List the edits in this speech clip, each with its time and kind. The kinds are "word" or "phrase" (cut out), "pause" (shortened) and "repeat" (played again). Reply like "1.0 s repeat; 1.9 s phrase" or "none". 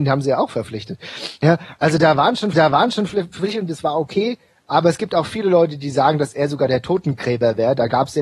2.5 s repeat

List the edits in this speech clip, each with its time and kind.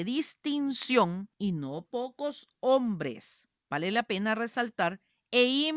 1.3 s pause; 3.6 s pause

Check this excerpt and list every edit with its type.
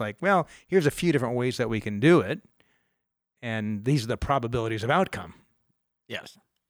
none

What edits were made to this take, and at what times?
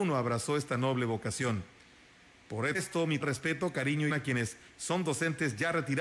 2.7 s word; 3.2 s word; 4.1 s word

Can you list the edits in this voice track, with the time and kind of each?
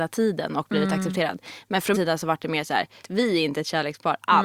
1.9 s word; 3.0 s word

